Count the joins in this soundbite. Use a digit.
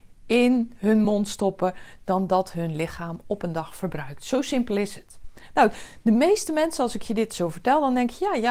0